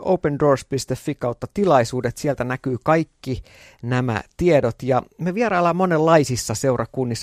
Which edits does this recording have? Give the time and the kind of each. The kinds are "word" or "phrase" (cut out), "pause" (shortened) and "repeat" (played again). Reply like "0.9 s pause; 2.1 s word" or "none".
none